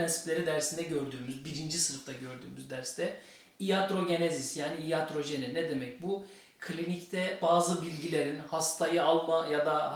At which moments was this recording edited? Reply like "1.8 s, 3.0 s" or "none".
none